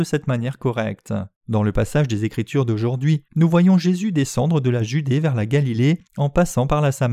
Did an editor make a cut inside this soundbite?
yes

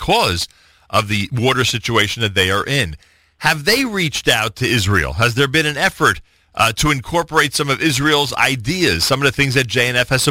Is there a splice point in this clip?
no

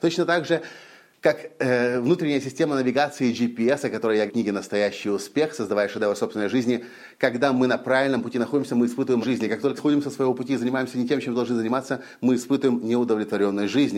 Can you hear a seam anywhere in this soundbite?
yes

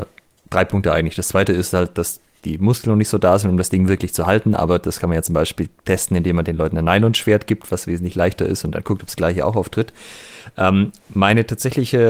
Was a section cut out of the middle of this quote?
no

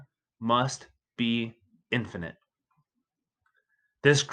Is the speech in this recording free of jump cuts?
yes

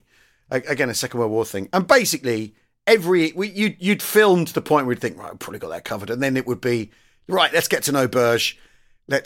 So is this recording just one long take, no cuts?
yes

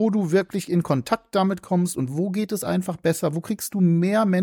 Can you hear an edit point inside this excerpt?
no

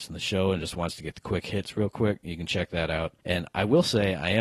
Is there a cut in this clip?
yes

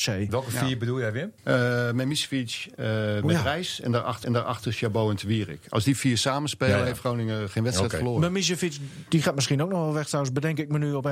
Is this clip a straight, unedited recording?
no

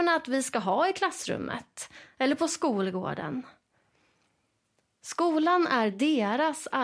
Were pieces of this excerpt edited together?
no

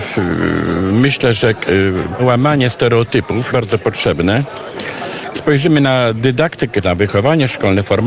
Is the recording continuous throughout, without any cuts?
no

